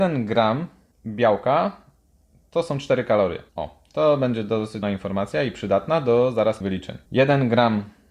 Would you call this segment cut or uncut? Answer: cut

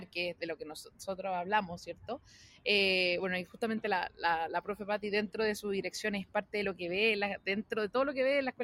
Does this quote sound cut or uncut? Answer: uncut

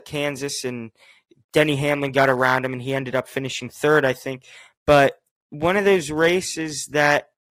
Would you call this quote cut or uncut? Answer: uncut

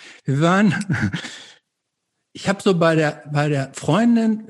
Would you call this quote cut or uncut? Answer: uncut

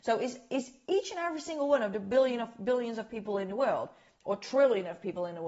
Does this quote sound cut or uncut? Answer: uncut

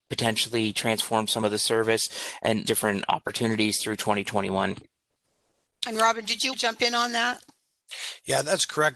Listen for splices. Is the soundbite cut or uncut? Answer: cut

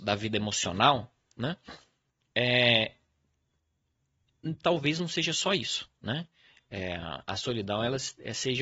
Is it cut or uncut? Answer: uncut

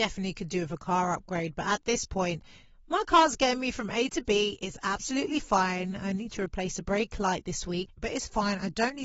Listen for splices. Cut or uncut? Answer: uncut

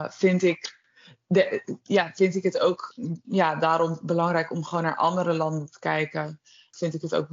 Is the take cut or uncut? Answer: uncut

